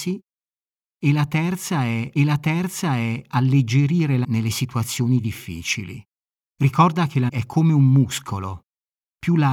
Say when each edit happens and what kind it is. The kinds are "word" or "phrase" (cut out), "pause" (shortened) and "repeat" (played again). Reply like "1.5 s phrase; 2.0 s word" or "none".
2.2 s repeat; 4.2 s word; 6.3 s pause; 7.3 s word